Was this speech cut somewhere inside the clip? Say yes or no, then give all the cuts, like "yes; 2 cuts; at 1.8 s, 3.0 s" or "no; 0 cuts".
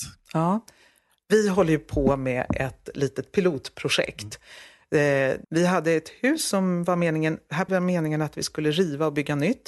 yes; 2 cuts; at 5.4 s, 7.7 s